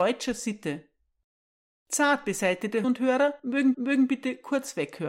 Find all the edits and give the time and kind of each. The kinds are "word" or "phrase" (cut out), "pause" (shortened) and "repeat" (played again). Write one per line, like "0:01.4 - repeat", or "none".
0:02.8 - word
0:03.7 - repeat